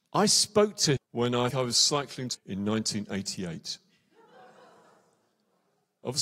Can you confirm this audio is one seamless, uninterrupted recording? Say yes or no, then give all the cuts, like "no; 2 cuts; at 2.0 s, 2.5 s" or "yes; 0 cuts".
no; 3 cuts; at 1.0 s, 1.5 s, 2.3 s